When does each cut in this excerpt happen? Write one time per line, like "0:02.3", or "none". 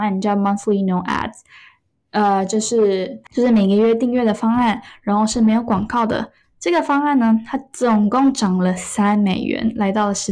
none

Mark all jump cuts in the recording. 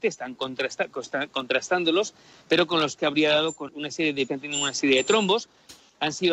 0:03.0
0:03.7
0:04.3

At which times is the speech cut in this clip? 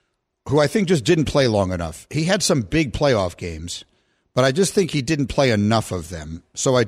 none

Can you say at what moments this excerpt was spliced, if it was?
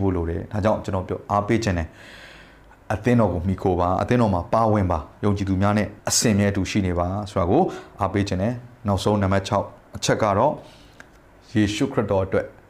0:06.0

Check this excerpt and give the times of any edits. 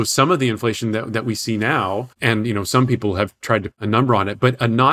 0:02.1
0:03.7

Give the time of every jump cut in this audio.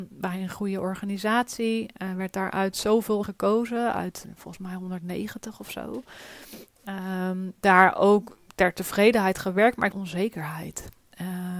0:03.2
0:07.6
0:09.9

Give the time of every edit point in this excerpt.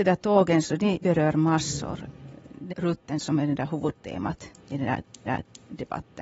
0:01.0
0:02.7
0:03.2
0:04.6
0:05.3

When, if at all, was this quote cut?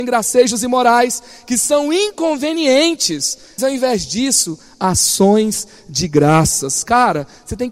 0:03.6

